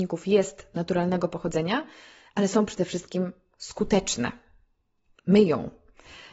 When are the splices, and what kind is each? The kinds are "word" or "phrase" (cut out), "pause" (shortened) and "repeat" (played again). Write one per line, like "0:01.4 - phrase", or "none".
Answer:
none